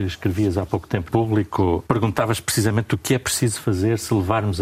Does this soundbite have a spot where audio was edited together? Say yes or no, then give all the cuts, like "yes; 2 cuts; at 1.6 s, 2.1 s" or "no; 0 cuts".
yes; 2 cuts; at 1.1 s, 1.8 s